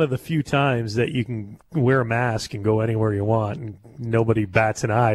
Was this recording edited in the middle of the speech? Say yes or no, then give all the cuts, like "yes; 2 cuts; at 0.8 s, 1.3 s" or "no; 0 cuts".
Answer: no; 0 cuts